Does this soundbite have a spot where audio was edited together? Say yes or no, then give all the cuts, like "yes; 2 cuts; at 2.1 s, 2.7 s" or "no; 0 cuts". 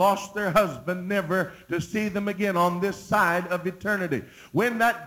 no; 0 cuts